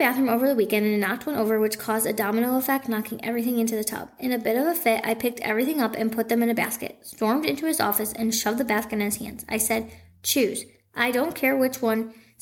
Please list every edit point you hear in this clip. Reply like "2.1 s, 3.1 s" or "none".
none